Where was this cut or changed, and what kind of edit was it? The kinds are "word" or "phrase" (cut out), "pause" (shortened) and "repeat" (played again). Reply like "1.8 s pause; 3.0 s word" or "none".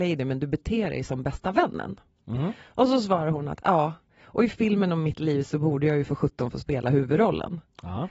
none